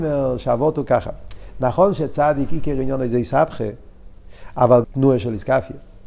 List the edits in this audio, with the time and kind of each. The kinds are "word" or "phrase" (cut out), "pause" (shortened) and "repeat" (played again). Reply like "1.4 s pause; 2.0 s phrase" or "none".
4.8 s phrase

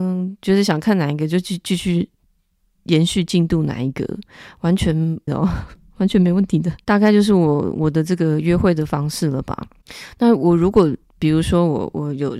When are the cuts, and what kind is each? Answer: 5.3 s word

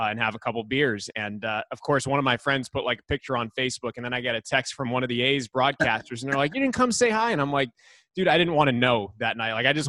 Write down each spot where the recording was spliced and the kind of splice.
none

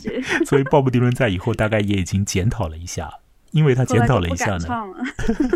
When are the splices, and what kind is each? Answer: 3.5 s word

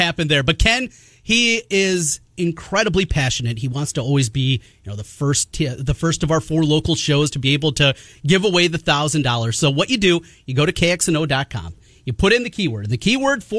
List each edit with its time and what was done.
none

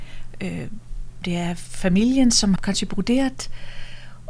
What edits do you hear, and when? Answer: 1.2 s word; 2.6 s word

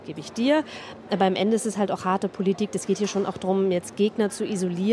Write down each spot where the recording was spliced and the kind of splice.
none

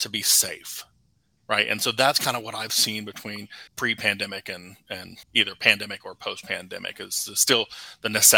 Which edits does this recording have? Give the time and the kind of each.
3.7 s pause; 5.2 s pause

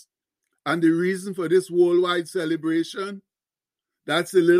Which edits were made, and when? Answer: none

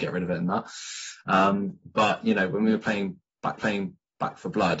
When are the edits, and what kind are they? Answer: 3.6 s repeat

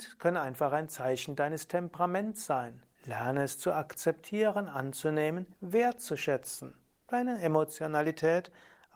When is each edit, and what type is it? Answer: 2.9 s pause; 5.5 s pause

